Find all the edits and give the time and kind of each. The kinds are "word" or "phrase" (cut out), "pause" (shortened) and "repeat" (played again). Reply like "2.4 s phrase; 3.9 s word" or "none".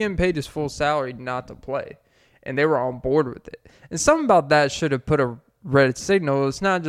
none